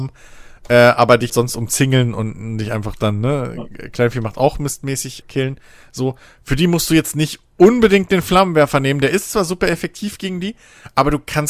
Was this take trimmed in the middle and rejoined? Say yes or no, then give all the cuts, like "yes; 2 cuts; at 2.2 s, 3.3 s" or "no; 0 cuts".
yes; 2 cuts; at 1.3 s, 5.2 s